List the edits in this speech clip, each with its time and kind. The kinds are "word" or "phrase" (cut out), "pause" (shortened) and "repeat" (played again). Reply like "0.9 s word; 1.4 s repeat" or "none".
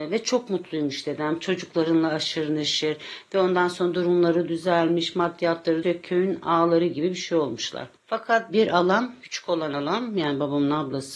5.8 s word; 8.0 s pause